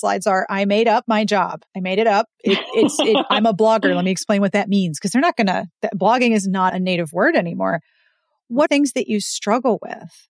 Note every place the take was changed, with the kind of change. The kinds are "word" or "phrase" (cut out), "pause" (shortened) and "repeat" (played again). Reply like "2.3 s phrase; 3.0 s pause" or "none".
1.7 s pause; 2.3 s pause; 6.7 s word; 8.7 s phrase